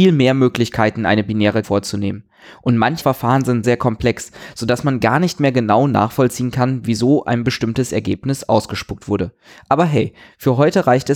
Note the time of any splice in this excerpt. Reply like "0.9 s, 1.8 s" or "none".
1.6 s, 3.0 s, 3.6 s